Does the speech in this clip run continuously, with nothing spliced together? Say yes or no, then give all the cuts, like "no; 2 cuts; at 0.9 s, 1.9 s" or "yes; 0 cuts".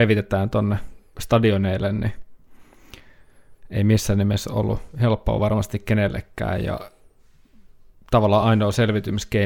yes; 0 cuts